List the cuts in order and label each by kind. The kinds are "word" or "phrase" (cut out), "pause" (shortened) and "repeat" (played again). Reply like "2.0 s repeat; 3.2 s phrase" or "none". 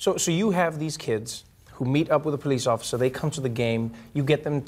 none